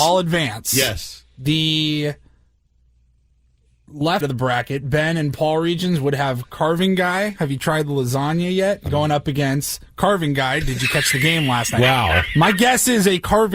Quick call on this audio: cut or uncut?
cut